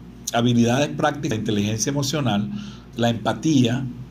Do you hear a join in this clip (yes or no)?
yes